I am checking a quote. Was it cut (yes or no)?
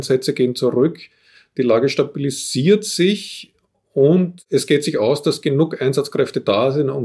no